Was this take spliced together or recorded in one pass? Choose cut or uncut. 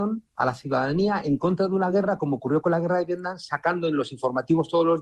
uncut